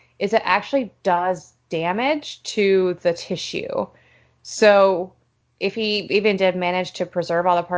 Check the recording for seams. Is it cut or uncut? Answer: uncut